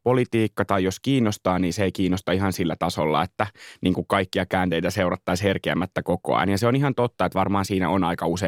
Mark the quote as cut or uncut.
uncut